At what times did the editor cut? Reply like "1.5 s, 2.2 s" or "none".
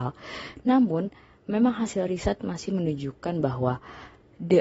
none